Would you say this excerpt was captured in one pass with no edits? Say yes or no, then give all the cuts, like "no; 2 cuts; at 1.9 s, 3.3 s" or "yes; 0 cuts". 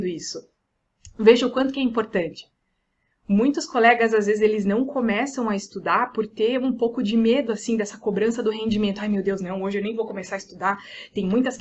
yes; 0 cuts